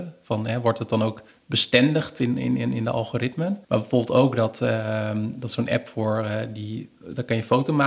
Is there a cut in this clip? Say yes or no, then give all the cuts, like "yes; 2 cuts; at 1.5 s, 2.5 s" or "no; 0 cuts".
yes; 2 cuts; at 1.3 s, 3.6 s